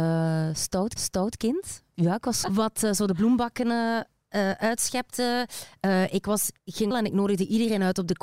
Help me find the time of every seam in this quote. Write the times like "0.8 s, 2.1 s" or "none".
1.0 s, 2.4 s, 6.6 s, 6.9 s